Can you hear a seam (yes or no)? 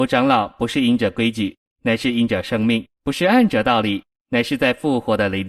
yes